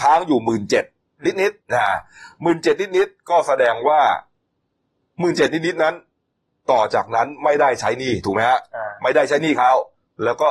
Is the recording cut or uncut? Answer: cut